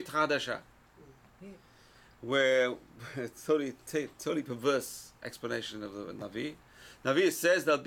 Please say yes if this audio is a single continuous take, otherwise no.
yes